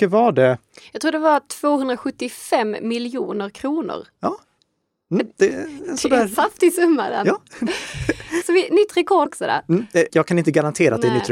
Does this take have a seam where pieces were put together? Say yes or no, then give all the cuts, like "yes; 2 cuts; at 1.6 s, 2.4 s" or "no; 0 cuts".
yes; 3 cuts; at 8.4 s, 9.3 s, 10.1 s